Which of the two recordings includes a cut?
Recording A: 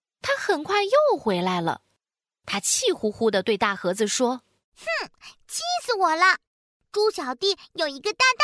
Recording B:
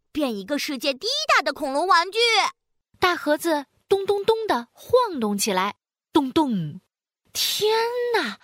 B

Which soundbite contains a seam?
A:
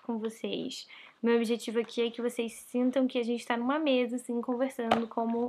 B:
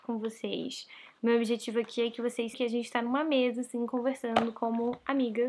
B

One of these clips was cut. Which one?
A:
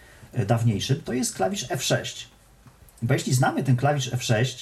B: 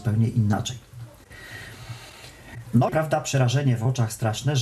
B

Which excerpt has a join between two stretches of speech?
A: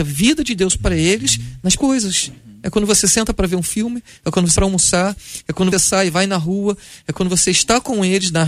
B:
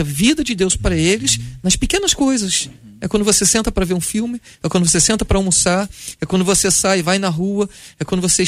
A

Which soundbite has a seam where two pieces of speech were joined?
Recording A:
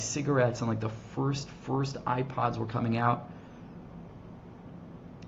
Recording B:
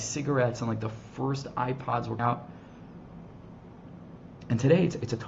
B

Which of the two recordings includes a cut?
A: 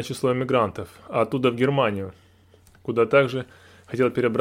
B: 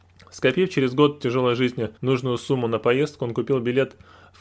B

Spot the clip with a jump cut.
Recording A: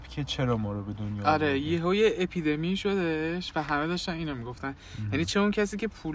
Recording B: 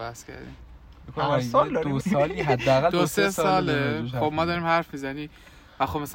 B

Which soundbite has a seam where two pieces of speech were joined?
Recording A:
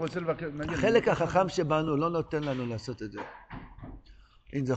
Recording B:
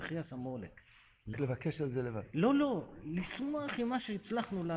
B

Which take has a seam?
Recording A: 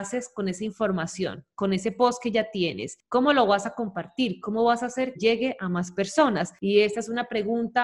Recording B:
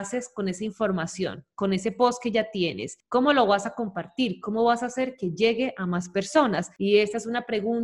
A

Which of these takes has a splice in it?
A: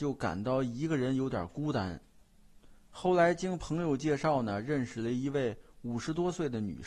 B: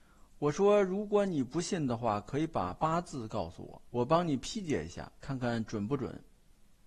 B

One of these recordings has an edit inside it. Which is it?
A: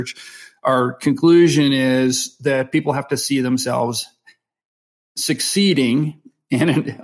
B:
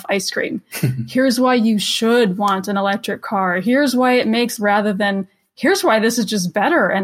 B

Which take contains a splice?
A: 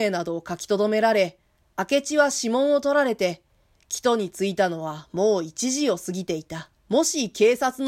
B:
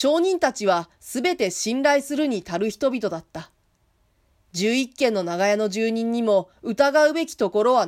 A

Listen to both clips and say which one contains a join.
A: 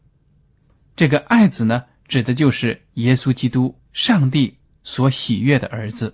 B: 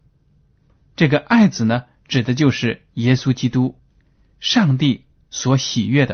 A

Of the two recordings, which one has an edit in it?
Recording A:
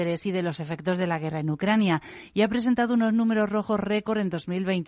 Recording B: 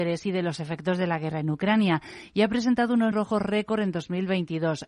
B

